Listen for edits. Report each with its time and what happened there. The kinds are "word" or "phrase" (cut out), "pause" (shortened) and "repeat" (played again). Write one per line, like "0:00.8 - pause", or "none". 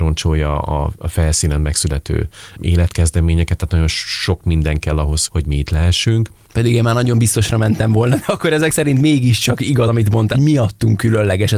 0:02.6 - word
0:05.3 - word
0:09.9 - word
0:10.3 - word